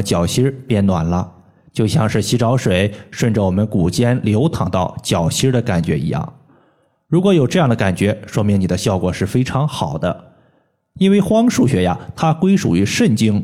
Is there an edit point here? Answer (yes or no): no